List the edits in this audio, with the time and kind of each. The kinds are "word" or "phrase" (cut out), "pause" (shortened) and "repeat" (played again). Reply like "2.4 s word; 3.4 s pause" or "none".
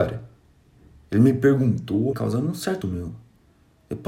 2.1 s word; 2.8 s word